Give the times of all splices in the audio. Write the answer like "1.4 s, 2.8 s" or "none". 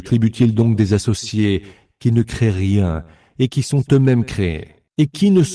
none